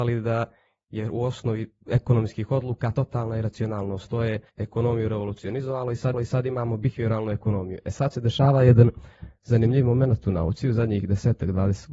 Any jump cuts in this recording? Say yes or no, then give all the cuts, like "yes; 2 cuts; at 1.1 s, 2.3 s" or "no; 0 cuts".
yes; 4 cuts; at 1.8 s, 2.9 s, 4.5 s, 6.1 s